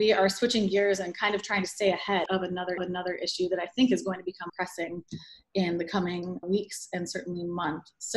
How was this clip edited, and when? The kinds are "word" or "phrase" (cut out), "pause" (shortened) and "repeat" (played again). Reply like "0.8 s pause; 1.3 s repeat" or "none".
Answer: 2.3 s word; 2.8 s repeat; 4.5 s phrase; 6.4 s word